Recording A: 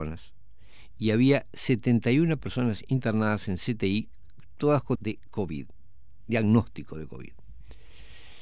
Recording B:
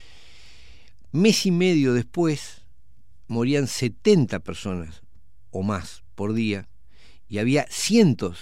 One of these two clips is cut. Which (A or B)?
A